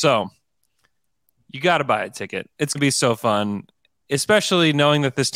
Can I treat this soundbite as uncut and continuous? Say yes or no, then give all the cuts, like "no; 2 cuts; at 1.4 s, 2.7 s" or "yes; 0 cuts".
no; 1 cut; at 2.7 s